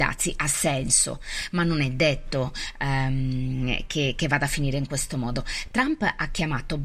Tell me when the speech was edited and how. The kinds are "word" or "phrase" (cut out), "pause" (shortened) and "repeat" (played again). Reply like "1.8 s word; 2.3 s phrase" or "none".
none